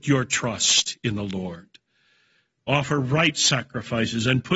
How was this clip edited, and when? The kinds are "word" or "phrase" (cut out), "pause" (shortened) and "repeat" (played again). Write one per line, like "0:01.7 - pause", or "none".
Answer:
none